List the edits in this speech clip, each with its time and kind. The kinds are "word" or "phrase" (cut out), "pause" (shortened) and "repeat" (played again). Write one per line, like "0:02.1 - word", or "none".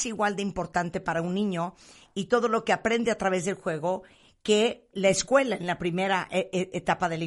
0:04.9 - word

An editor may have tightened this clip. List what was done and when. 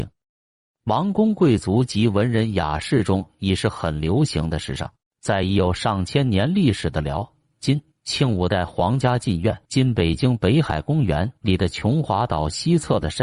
0:05.0 - pause
0:07.9 - phrase
0:09.6 - pause
0:11.4 - pause

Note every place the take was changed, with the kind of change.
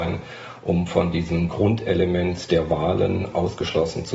0:01.5 - word

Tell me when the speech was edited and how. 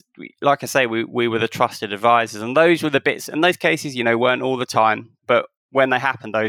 0:05.2 - word

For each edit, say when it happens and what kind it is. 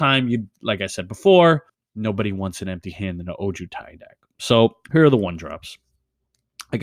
0:01.7 - pause
0:04.8 - pause

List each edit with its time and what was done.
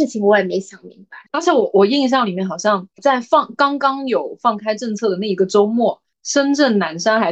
0:01.3 - pause
0:03.0 - word

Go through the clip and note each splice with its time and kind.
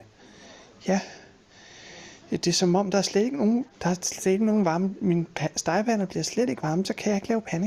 0:03.7 - pause

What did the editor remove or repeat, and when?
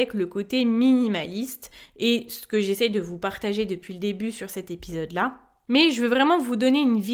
none

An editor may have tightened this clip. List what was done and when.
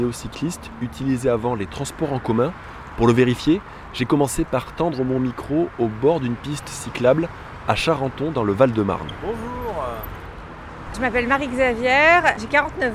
0:10.9 - word

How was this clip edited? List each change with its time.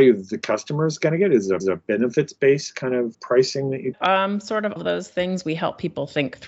0:01.6 - repeat
0:03.1 - word
0:03.9 - phrase
0:04.8 - word

